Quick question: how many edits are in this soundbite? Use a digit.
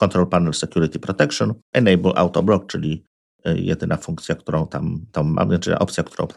2